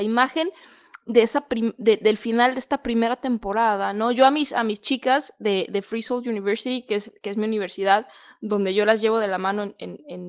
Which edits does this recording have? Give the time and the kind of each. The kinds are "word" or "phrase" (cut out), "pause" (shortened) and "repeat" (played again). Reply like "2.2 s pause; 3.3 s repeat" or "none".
none

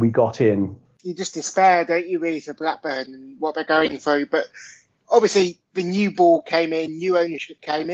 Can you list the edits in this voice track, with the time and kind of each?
none

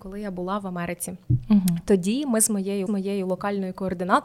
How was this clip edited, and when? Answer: 2.9 s repeat

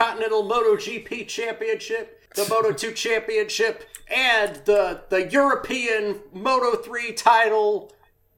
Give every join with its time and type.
2.3 s pause

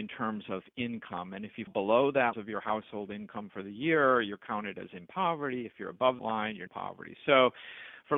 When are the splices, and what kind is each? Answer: 1.7 s word; 2.3 s phrase; 6.2 s word; 6.7 s phrase

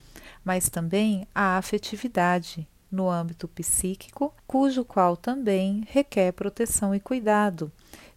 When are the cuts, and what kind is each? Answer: 4.4 s pause

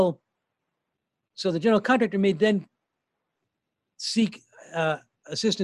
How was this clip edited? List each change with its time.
none

